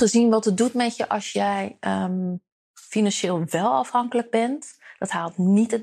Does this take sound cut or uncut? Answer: uncut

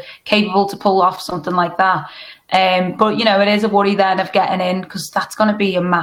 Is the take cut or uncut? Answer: uncut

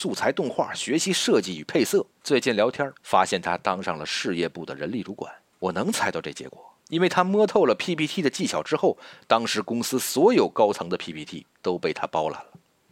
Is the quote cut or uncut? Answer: cut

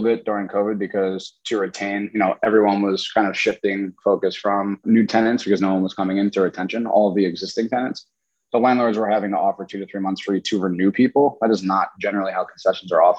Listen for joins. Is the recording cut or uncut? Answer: cut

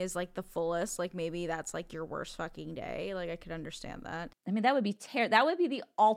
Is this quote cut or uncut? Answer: uncut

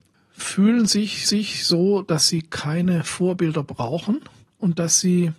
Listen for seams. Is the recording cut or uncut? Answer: cut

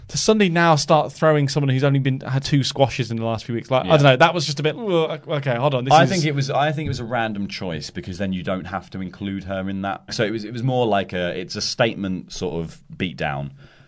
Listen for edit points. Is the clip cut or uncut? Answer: cut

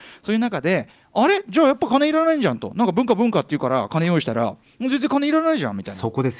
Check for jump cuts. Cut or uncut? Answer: uncut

